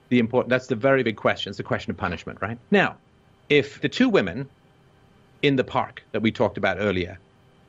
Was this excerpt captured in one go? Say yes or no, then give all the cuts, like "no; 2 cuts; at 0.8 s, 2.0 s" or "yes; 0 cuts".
no; 3 cuts; at 1.0 s, 2.6 s, 3.8 s